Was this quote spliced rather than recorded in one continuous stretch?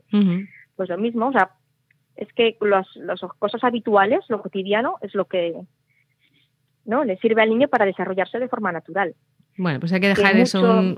no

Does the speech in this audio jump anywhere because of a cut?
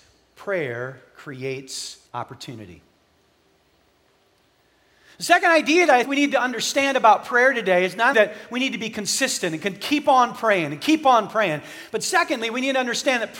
yes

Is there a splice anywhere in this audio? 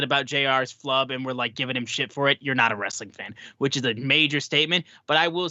no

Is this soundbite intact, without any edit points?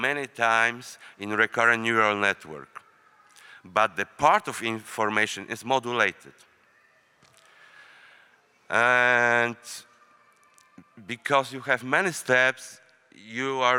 yes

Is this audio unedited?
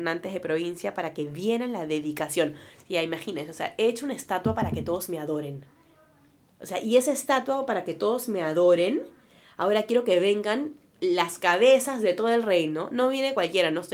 yes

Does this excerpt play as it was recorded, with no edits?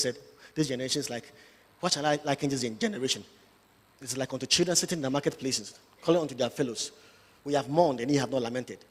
yes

